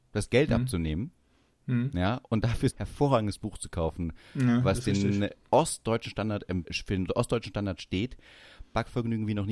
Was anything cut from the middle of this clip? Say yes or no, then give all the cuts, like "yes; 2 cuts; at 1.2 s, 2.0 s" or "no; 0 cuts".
yes; 2 cuts; at 2.7 s, 6.6 s